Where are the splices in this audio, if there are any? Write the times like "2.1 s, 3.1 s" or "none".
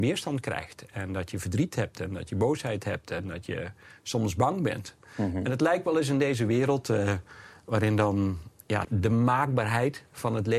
8.8 s